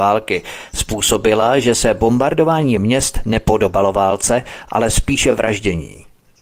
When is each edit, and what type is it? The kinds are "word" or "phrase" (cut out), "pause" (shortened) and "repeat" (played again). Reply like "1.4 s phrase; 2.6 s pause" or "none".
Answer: none